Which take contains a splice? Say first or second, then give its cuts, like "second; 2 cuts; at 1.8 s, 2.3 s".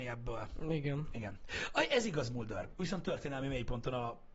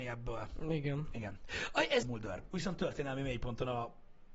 second; 1 cut; at 2.0 s